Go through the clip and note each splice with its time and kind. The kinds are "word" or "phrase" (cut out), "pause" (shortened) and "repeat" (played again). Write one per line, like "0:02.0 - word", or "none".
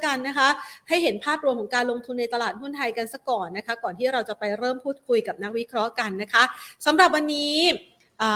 none